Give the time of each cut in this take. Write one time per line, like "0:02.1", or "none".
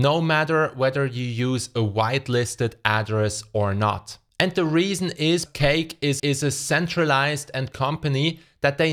0:05.5
0:06.2
0:07.7